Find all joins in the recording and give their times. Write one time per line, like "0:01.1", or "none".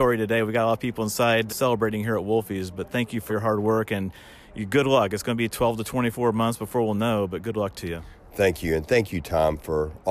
0:01.5
0:03.3